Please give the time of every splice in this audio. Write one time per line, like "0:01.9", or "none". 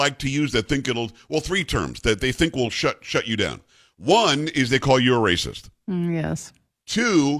none

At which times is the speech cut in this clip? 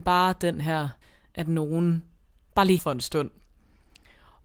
0:01.0
0:02.8

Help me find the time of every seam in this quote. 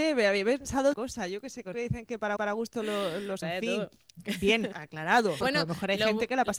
0:00.9
0:01.7
0:02.4
0:03.4
0:04.7
0:05.4

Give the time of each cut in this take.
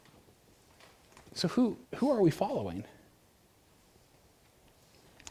0:01.8

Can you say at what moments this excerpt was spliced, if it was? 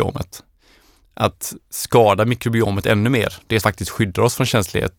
0:03.6

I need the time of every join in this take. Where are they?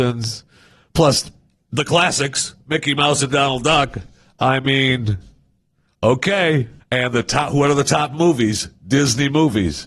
0:06.8

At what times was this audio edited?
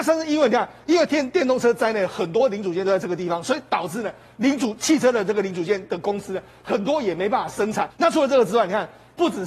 0:07.9

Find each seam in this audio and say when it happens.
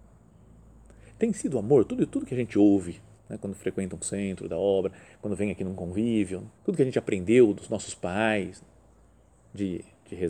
0:03.2
0:06.6

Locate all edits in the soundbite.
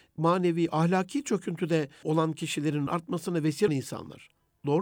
0:02.0
0:02.9
0:03.7

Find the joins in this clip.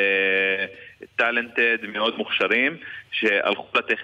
none

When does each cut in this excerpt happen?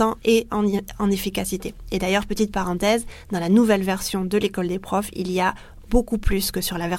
none

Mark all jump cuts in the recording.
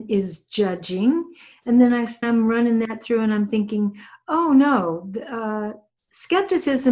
0:02.2

